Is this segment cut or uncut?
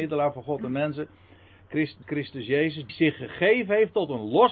cut